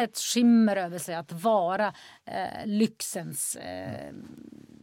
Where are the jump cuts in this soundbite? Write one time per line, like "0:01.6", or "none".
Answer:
none